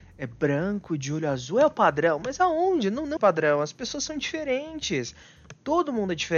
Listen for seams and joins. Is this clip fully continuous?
no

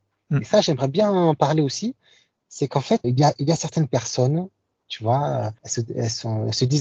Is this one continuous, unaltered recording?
no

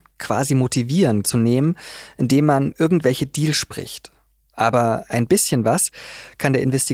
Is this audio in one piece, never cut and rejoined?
no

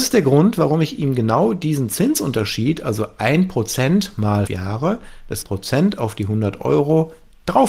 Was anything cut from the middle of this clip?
yes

